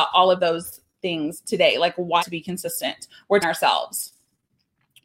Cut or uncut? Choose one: cut